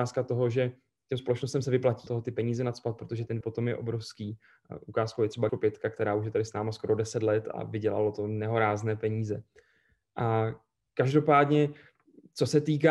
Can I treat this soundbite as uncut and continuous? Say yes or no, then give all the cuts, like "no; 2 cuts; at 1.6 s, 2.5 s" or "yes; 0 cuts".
no; 3 cuts; at 2.1 s, 3.4 s, 5.5 s